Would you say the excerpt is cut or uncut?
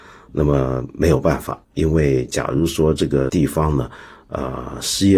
uncut